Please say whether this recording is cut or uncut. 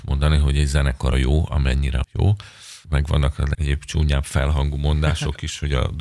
cut